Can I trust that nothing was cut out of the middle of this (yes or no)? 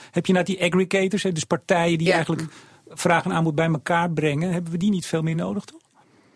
yes